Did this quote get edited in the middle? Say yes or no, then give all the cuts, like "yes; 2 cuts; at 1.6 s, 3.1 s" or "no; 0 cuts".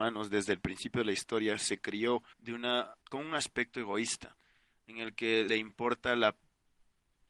yes; 3 cuts; at 2.3 s, 3.0 s, 5.5 s